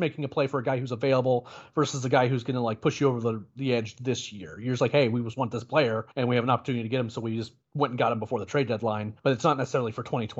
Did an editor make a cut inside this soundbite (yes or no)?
yes